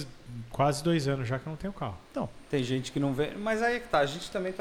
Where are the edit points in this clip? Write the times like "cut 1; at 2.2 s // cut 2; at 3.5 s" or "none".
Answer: cut 1; at 2.4 s